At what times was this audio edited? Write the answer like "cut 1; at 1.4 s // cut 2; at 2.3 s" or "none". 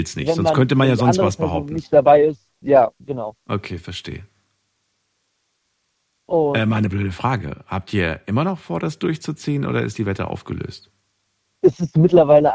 cut 1; at 2.6 s